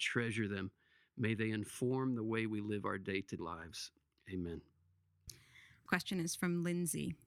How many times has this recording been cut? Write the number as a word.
two